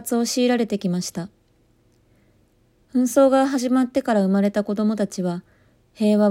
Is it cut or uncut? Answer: uncut